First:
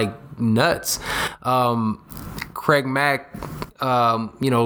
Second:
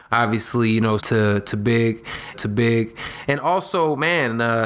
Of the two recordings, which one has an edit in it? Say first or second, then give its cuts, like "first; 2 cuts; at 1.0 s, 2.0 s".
second; 2 cuts; at 1.0 s, 2.3 s